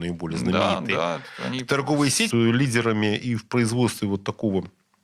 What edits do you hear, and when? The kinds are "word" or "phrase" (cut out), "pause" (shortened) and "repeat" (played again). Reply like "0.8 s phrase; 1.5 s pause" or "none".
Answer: 2.3 s phrase